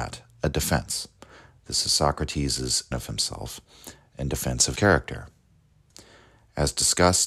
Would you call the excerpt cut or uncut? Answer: cut